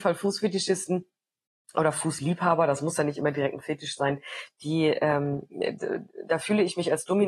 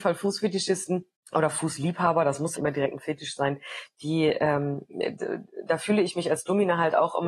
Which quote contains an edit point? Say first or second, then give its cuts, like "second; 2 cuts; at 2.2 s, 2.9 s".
second; 2 cuts; at 1.1 s, 2.5 s